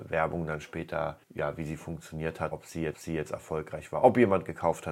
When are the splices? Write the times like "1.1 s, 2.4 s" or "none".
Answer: 1.2 s, 2.5 s, 2.9 s